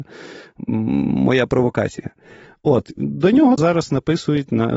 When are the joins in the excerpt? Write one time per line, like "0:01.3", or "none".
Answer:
0:03.0
0:03.6